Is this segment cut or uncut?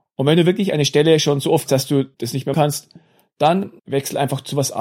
cut